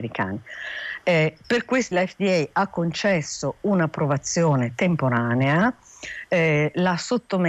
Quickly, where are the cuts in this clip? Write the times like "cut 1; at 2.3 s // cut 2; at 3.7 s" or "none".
cut 1; at 1.4 s // cut 2; at 1.9 s